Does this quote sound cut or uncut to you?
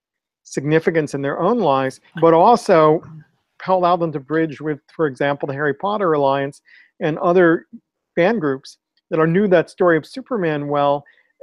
cut